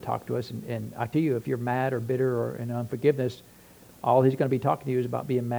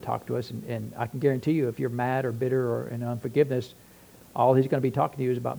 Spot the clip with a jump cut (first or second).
first